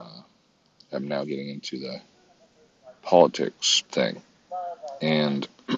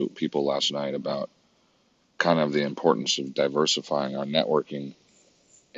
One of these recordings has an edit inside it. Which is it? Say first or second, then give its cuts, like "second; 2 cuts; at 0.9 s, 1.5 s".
first; 1 cut; at 3.9 s